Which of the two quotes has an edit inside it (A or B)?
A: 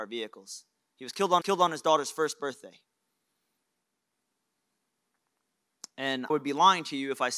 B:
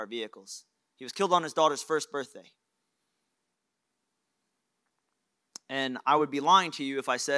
A